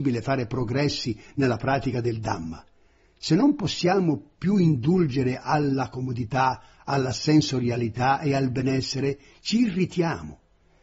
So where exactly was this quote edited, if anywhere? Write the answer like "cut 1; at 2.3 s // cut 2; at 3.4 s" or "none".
none